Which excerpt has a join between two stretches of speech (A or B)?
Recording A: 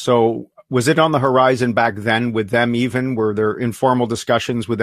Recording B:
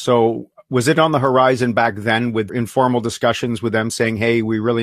B